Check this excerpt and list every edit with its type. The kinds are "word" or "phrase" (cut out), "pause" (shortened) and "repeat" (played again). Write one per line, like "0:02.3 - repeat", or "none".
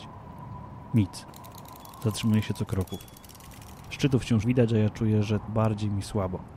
0:02.7 - word
0:04.4 - word
0:05.5 - word